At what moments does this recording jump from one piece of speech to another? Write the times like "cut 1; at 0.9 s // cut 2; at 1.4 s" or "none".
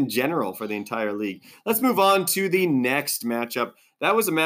none